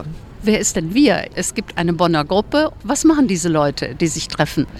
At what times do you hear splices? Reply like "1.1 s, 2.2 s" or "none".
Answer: none